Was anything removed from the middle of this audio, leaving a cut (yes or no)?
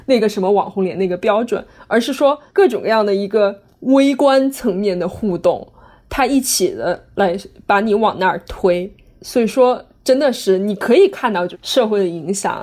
no